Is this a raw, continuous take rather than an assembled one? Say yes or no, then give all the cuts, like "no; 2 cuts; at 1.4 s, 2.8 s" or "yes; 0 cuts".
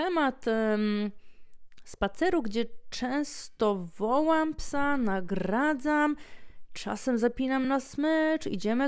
yes; 0 cuts